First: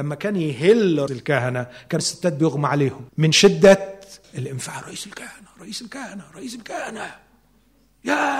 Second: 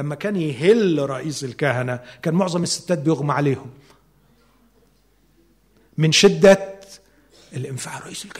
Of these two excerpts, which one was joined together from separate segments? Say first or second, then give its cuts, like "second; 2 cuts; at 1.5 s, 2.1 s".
first; 4 cuts; at 1.1 s, 2.0 s, 3.1 s, 4.2 s